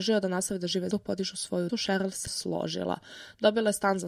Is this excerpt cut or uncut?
cut